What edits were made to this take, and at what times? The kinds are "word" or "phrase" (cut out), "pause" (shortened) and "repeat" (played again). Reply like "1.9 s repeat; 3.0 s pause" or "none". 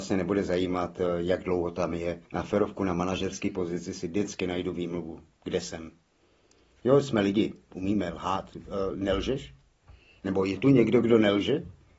2.3 s pause